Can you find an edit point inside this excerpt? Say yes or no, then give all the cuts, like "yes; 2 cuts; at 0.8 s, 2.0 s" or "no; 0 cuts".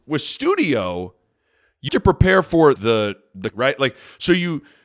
yes; 3 cuts; at 1.9 s, 2.8 s, 3.5 s